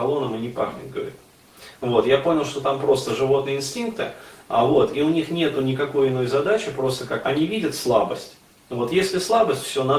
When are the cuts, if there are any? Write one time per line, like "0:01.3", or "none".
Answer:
0:07.2